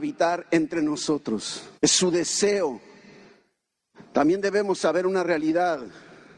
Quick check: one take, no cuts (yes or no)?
no